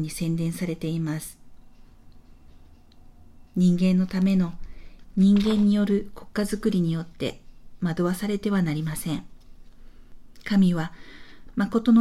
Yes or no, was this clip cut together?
yes